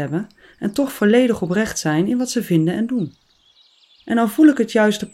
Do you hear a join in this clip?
no; 0 cuts

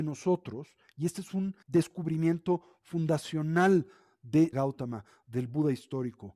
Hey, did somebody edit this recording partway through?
yes; 2 cuts; at 1.6 s, 4.5 s

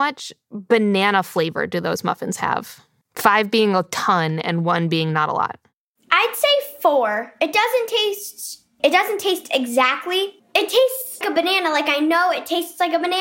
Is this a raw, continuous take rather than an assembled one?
no; 2 cuts; at 8.8 s, 11.2 s

